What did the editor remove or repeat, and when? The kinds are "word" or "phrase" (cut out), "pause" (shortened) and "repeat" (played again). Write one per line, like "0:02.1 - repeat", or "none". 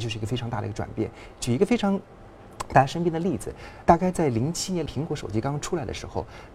0:03.8 - word
0:04.9 - phrase